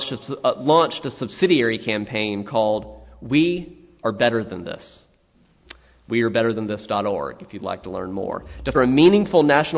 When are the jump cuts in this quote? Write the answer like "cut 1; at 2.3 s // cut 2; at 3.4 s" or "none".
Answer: cut 1; at 8.7 s

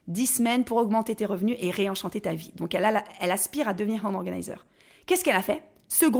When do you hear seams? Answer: none

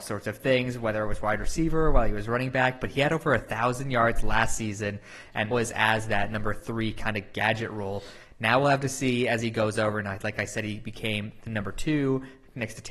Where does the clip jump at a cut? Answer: cut 1; at 5.5 s

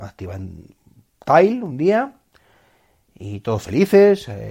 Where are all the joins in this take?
none

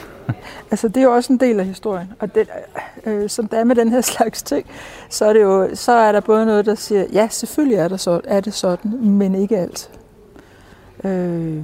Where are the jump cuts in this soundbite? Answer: none

